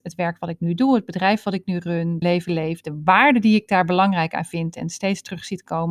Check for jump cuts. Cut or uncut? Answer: cut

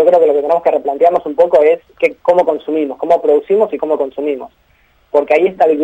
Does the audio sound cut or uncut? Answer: cut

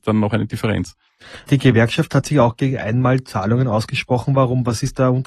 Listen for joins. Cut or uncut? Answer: uncut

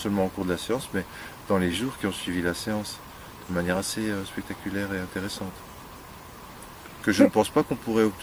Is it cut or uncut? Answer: uncut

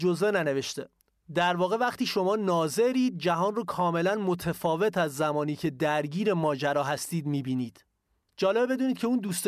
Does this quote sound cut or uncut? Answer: uncut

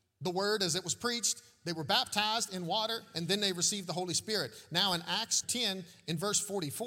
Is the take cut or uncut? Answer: cut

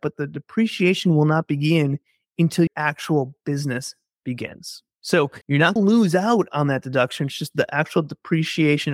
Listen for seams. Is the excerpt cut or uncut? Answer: cut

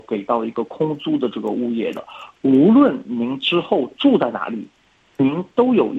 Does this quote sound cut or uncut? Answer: uncut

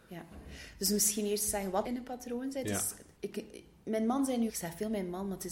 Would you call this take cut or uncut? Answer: cut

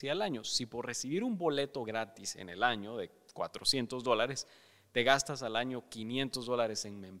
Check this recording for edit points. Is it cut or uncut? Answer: uncut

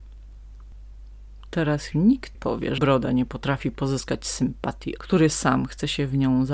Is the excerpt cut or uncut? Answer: cut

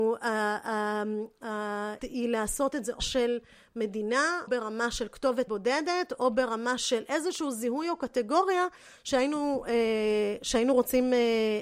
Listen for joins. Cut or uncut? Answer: cut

